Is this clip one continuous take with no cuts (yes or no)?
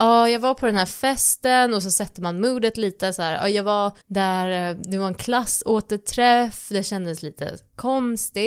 no